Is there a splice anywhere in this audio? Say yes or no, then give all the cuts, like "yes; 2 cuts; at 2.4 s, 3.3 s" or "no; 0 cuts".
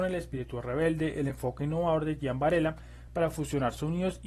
no; 0 cuts